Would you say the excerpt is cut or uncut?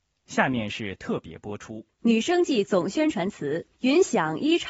cut